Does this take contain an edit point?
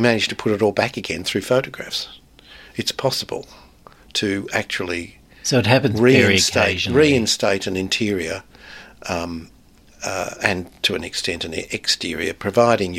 no; 0 cuts

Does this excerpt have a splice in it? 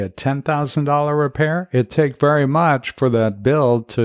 yes; 1 cut; at 1.9 s

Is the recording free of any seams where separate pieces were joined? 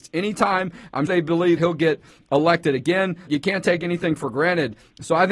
no; 3 cuts; at 1.1 s, 1.6 s, 3.3 s

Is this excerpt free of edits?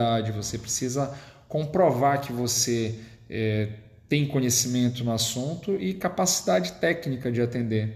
yes; 0 cuts

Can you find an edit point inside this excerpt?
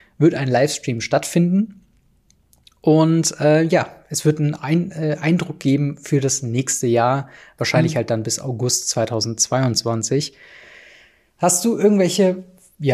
no; 0 cuts

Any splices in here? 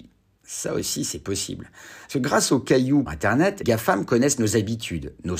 yes; 2 cuts; at 3.1 s, 3.6 s

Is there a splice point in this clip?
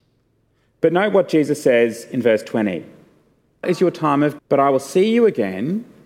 yes; 2 cuts; at 3.6 s, 4.4 s

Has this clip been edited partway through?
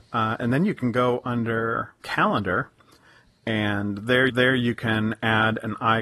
yes; 2 cuts; at 2.0 s, 4.3 s

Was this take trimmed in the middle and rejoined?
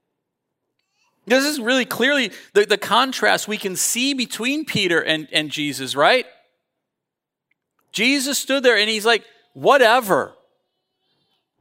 no; 0 cuts

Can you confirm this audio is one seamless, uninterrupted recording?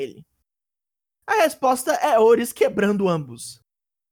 yes; 0 cuts

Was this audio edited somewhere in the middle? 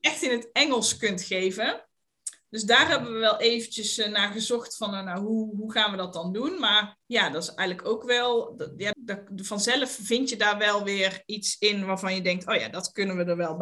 yes; 2 cuts; at 7.0 s, 8.9 s

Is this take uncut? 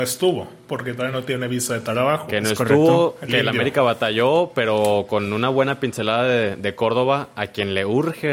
yes; 0 cuts

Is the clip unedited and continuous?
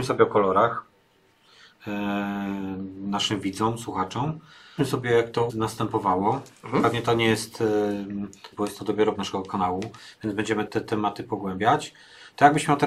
no; 5 cuts; at 4.8 s, 5.5 s, 8.5 s, 9.1 s, 10.7 s

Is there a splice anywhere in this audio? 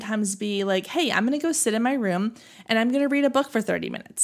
no; 0 cuts

